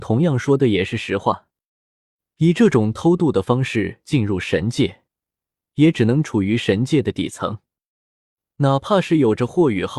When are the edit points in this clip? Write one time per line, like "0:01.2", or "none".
none